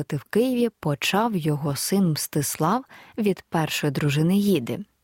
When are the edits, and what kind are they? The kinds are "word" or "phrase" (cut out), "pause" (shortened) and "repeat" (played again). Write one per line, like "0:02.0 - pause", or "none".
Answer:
none